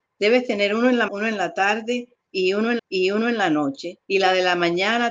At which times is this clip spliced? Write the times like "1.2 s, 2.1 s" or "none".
1.1 s, 2.8 s, 4.0 s